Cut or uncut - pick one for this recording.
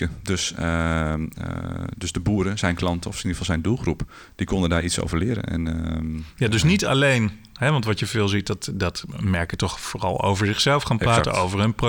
uncut